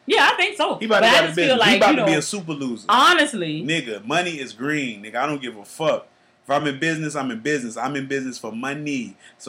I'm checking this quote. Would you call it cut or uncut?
uncut